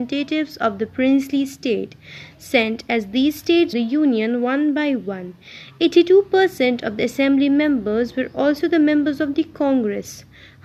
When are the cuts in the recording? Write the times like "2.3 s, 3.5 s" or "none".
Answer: 3.7 s